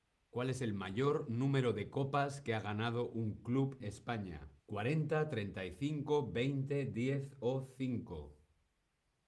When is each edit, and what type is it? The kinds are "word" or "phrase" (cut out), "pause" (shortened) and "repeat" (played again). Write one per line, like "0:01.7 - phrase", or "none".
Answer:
0:03.8 - word
0:04.6 - pause